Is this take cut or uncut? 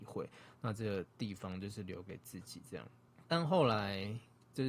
cut